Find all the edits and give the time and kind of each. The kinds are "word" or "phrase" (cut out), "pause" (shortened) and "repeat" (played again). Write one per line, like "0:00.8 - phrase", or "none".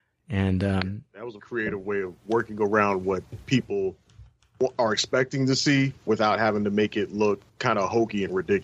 0:01.4 - word
0:06.0 - pause
0:07.5 - pause